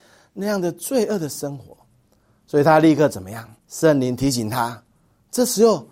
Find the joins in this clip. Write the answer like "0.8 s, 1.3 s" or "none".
3.6 s